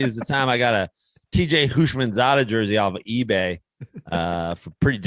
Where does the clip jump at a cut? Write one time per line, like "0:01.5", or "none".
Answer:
none

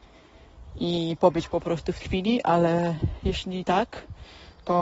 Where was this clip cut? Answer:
0:02.0

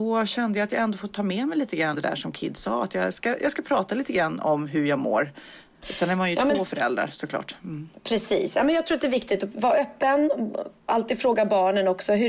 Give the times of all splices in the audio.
0:01.9
0:10.9

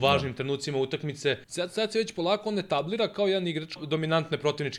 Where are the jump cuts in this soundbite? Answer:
0:01.4
0:03.8

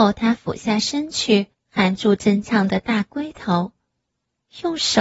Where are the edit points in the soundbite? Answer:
0:01.5

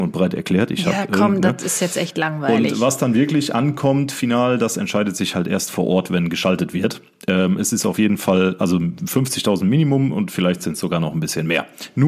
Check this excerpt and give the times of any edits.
none

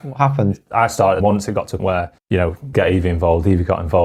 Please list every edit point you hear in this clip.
0:01.2
0:01.8
0:02.2
0:02.7

